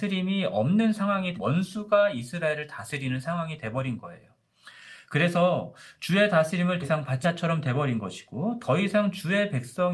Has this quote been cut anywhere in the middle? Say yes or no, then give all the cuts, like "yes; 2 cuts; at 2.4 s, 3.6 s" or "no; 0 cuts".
yes; 3 cuts; at 1.4 s, 6.8 s, 7.2 s